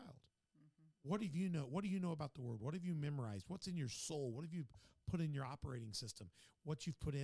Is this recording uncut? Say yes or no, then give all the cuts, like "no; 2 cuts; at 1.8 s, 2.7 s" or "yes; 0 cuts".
yes; 0 cuts